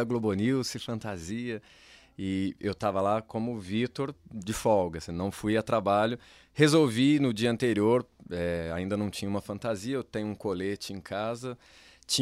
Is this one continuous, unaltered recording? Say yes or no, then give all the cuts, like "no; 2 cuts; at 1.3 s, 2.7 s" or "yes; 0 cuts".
yes; 0 cuts